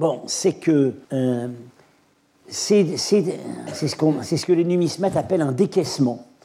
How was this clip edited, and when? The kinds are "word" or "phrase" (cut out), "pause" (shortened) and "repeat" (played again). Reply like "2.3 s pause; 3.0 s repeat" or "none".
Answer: 1.0 s pause